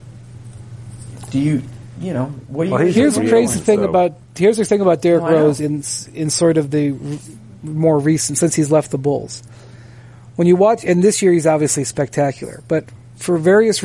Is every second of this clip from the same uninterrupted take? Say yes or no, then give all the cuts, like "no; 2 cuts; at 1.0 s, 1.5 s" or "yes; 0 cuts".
no; 1 cut; at 4.2 s